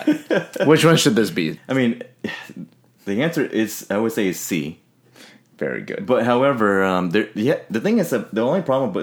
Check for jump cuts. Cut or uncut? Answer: uncut